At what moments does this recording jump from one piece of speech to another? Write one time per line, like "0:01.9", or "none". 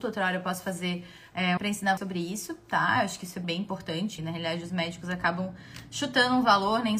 0:01.6
0:02.0
0:03.4
0:04.2